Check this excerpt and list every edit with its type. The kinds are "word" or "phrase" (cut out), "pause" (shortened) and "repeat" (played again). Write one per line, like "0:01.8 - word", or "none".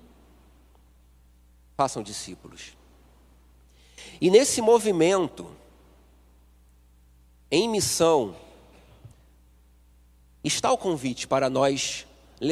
none